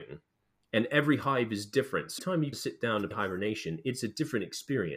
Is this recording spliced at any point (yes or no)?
yes